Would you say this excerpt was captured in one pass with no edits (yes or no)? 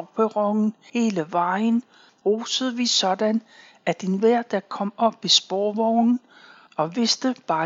yes